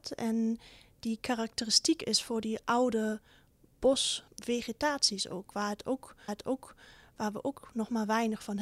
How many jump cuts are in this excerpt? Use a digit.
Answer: 2